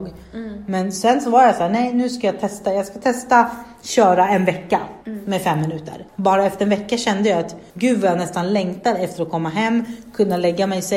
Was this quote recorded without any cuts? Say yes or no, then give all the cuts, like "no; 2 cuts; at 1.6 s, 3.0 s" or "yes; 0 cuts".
no; 3 cuts; at 5.0 s, 6.1 s, 7.7 s